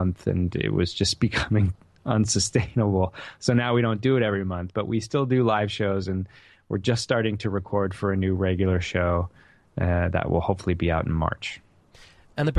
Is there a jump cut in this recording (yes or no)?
no